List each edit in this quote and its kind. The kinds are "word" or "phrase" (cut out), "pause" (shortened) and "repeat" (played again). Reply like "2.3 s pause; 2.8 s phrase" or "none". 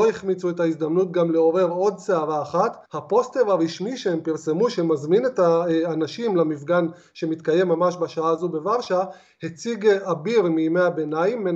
2.9 s pause